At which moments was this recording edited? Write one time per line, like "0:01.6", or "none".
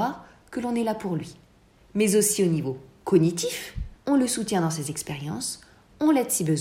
0:04.0